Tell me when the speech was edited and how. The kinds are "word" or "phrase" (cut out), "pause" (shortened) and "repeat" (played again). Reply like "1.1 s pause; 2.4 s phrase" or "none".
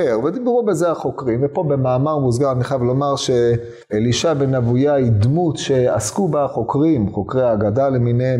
3.8 s pause